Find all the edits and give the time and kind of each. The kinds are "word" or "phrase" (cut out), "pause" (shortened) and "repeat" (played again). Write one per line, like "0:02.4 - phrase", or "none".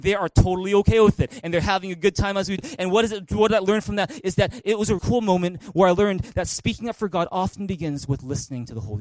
0:02.6 - word
0:05.0 - word